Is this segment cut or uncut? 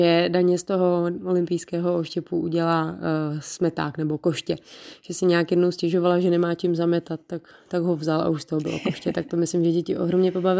uncut